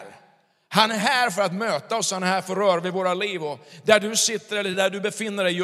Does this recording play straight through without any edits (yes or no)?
yes